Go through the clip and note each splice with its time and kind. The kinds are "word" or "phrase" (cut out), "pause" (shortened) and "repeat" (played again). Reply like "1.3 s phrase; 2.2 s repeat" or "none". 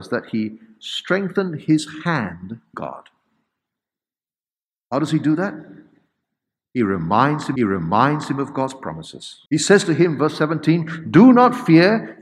2.7 s word; 7.6 s repeat; 9.5 s pause